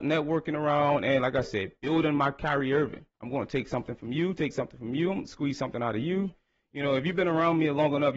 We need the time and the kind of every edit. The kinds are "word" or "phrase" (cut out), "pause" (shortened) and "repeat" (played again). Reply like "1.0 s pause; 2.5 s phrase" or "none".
3.1 s pause